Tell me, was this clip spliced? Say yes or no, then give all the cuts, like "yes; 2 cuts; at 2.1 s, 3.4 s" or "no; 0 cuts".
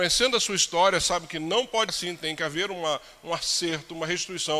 yes; 1 cut; at 1.9 s